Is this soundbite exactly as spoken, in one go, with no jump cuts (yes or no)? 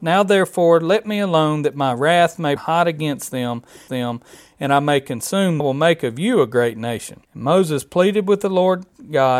no